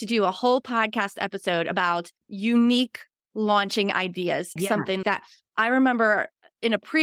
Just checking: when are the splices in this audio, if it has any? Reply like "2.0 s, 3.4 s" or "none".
2.2 s, 4.6 s, 5.0 s